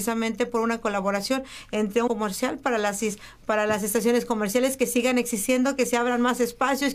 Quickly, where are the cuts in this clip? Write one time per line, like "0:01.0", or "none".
0:02.1